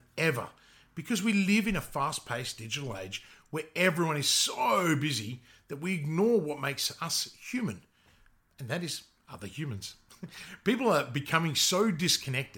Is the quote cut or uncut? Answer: uncut